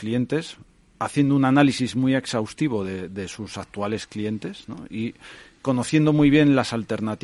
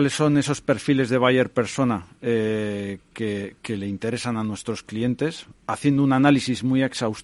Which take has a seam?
second; 1 cut; at 5.6 s

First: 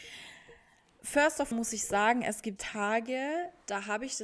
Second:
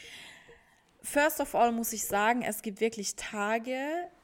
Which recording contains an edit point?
first; 2 cuts; at 1.5 s, 2.6 s

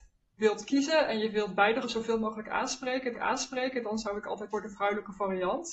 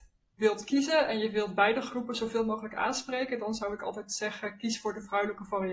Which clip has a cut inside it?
first; 3 cuts; at 1.8 s, 3.1 s, 4.5 s

